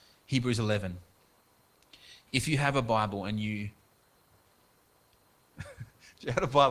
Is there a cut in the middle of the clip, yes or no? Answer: no